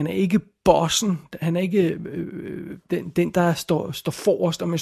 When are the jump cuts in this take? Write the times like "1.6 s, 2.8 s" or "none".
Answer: none